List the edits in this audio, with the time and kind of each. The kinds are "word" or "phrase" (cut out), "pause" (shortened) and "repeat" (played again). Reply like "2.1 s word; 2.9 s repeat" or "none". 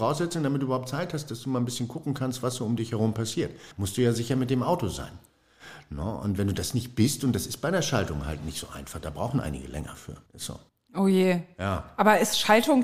3.7 s pause; 10.3 s pause; 10.7 s pause